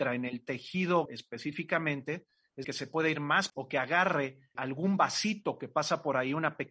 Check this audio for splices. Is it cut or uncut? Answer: cut